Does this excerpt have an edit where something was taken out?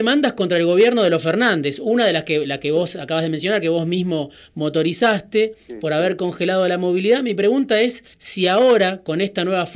yes; 1 cut; at 8.1 s

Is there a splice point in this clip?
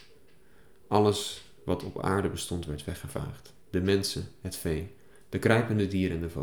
no; 0 cuts

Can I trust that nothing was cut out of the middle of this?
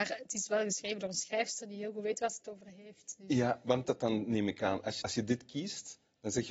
no; 2 cuts; at 3.8 s, 5.0 s

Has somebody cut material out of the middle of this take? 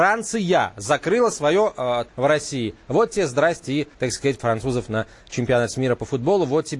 yes; 3 cuts; at 2.1 s, 3.9 s, 4.4 s

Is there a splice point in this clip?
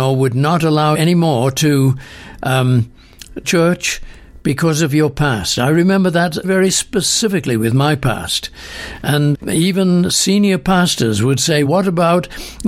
yes; 5 cuts; at 0.9 s, 3.4 s, 6.4 s, 9.3 s, 11.7 s

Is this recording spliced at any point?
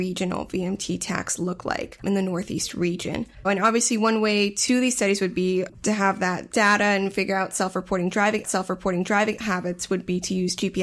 yes; 2 cuts; at 3.4 s, 8.4 s

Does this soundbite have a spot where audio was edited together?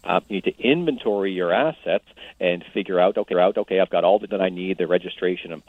yes; 2 cuts; at 3.3 s, 4.3 s

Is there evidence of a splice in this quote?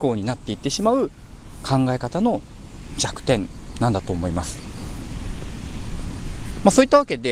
no; 0 cuts

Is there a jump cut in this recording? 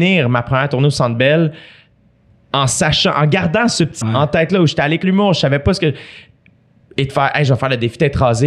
yes; 2 cuts; at 4.0 s, 5.0 s

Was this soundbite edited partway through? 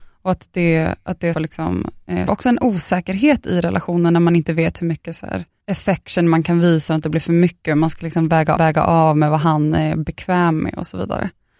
yes; 5 cuts; at 1.3 s, 2.3 s, 5.6 s, 6.9 s, 8.6 s

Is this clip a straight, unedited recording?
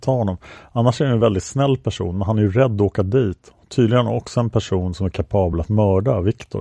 yes; 0 cuts

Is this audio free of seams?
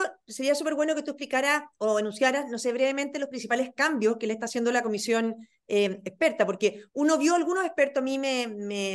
yes; 0 cuts

